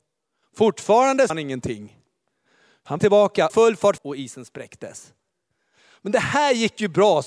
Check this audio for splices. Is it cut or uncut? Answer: cut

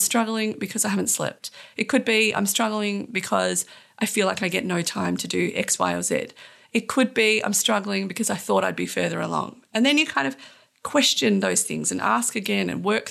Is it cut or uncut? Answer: uncut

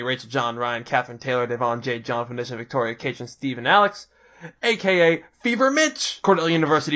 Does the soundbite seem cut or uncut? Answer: uncut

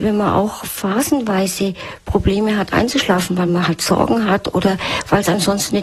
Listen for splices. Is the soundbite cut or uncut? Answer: uncut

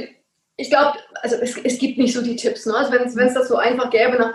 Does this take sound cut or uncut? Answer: uncut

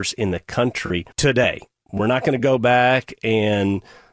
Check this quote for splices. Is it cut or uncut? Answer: cut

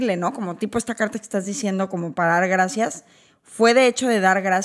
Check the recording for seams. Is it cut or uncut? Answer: uncut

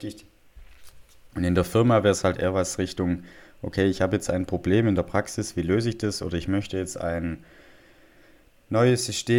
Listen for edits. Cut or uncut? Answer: cut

